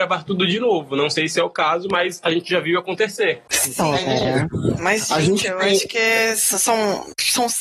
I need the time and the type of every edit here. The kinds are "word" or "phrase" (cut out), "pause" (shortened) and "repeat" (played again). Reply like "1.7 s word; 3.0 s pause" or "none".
none